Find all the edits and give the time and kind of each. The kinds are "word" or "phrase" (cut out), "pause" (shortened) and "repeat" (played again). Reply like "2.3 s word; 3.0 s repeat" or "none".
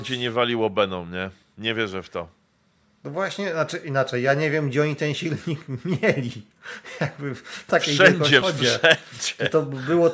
8.4 s word